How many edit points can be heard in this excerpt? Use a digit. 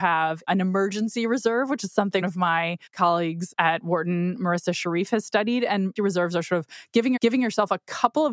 4